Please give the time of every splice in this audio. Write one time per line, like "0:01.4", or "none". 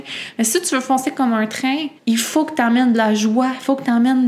0:02.0